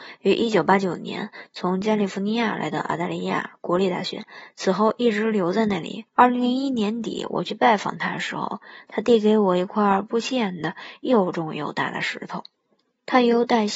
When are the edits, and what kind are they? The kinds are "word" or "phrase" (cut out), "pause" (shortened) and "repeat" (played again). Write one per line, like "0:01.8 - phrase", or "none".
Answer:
0:06.1 - pause